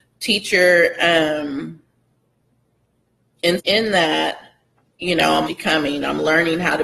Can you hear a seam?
yes; 2 cuts; at 3.6 s, 5.5 s

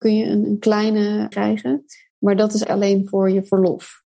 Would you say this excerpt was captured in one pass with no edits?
no; 2 cuts; at 1.3 s, 2.6 s

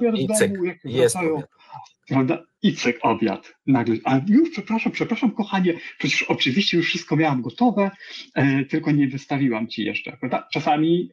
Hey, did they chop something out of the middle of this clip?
yes; 1 cut; at 1.9 s

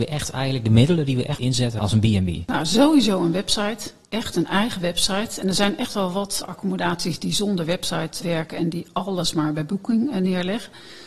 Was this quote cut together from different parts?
yes; 3 cuts; at 1.4 s, 6.4 s, 8.2 s

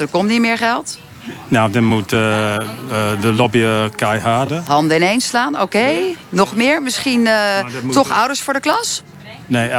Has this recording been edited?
no; 0 cuts

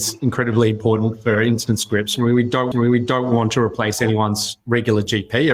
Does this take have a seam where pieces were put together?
yes; 1 cut; at 2.7 s

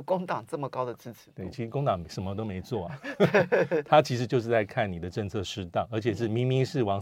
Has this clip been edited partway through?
no; 0 cuts

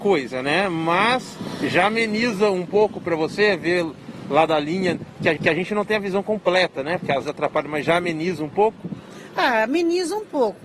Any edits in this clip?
yes; 2 cuts; at 5.4 s, 7.2 s

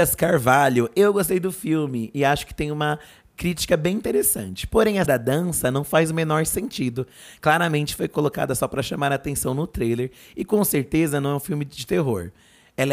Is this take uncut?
no; 1 cut; at 5.0 s

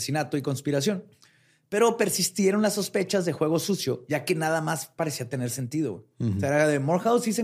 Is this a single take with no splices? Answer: yes; 0 cuts

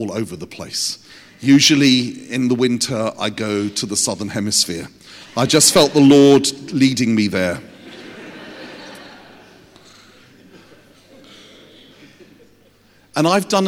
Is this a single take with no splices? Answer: yes; 0 cuts

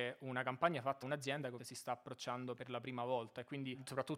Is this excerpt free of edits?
no; 2 cuts; at 1.0 s, 1.6 s

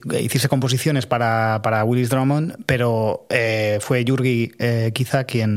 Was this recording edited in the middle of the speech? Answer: no; 0 cuts

